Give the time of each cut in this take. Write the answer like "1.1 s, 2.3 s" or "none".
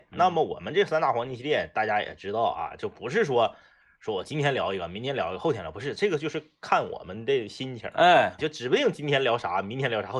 8.4 s